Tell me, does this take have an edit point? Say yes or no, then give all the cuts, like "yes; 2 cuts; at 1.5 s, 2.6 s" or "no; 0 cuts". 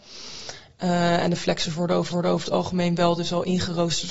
yes; 1 cut; at 2.1 s